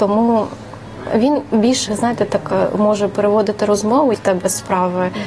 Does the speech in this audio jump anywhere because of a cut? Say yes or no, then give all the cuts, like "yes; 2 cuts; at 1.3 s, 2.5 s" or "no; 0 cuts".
yes; 2 cuts; at 1.9 s, 4.1 s